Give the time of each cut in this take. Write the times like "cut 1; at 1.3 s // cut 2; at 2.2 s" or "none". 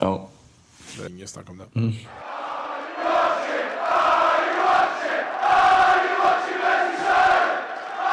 cut 1; at 1.1 s // cut 2; at 1.7 s